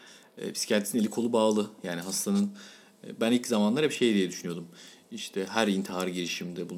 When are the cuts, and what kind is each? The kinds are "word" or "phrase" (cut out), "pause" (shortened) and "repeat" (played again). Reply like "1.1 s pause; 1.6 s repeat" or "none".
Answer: none